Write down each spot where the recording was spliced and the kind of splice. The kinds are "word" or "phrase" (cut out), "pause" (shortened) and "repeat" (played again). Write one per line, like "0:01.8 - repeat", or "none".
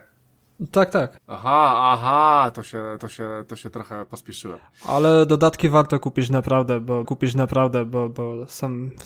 0:01.2 - pause
0:03.0 - repeat
0:07.0 - repeat